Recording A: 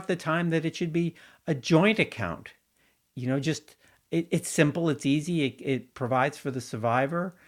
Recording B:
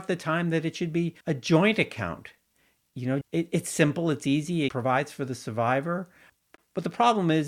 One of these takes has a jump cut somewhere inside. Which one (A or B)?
B